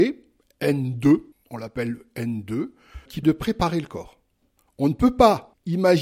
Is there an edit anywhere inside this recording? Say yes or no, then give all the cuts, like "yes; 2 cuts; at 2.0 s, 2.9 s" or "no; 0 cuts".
yes; 1 cut; at 3.2 s